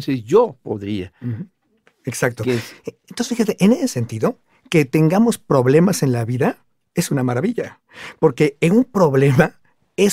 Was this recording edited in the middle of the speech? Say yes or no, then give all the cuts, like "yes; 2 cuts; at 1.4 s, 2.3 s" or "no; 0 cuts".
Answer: no; 0 cuts